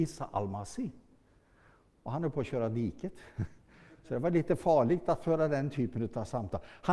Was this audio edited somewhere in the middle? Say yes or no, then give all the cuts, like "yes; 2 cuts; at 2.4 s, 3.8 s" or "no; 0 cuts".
no; 0 cuts